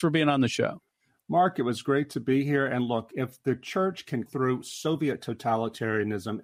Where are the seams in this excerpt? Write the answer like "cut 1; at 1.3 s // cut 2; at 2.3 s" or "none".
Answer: cut 1; at 4.3 s